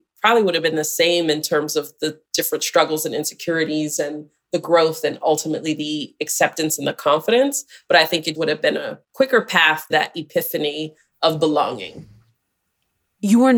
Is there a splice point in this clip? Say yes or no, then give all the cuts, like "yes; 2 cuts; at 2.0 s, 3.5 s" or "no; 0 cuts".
yes; 3 cuts; at 8.3 s, 9.0 s, 9.9 s